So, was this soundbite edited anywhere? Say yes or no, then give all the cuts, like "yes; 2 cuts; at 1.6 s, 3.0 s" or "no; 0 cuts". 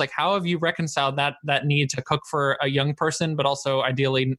no; 0 cuts